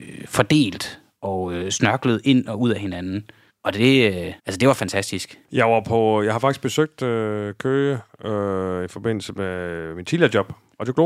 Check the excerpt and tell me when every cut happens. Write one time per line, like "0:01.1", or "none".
0:03.5
0:04.4
0:05.4